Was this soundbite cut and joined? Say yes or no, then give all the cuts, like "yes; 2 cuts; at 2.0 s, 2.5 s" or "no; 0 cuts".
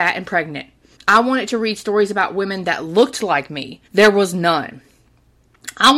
yes; 2 cuts; at 1.0 s, 3.9 s